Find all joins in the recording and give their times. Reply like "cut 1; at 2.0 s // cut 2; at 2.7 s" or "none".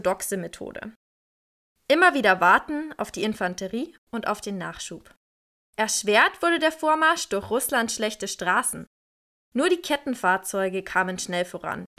none

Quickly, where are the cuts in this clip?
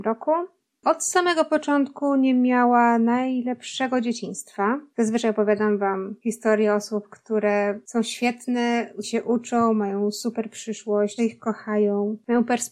cut 1; at 9.0 s // cut 2; at 11.2 s

